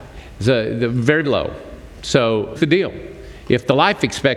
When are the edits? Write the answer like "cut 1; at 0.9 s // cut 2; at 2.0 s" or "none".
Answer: cut 1; at 1.2 s // cut 2; at 2.6 s